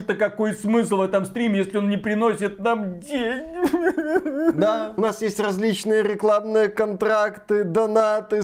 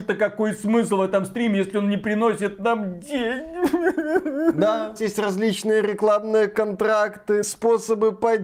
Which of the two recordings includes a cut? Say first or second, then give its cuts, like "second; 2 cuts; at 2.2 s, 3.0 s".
second; 2 cuts; at 5.0 s, 7.4 s